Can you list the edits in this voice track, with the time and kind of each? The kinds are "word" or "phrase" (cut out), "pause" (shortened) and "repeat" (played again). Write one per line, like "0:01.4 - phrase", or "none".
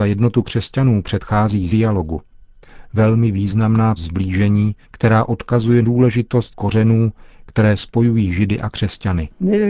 0:01.7 - phrase
0:04.0 - word
0:04.8 - pause
0:05.8 - word
0:06.5 - word